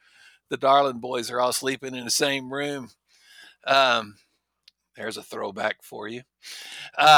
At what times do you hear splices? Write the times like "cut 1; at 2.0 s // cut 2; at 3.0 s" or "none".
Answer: none